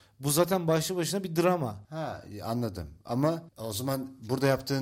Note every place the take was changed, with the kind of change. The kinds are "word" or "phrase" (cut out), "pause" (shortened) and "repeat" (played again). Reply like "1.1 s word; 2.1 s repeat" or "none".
1.8 s pause; 3.5 s pause